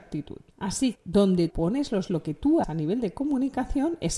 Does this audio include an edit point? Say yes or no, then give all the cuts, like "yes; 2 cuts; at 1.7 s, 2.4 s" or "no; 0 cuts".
yes; 4 cuts; at 0.9 s, 1.5 s, 2.1 s, 2.6 s